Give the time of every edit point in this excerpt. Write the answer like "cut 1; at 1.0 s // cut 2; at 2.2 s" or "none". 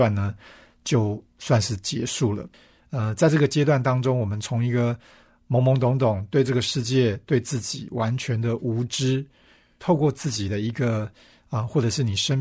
none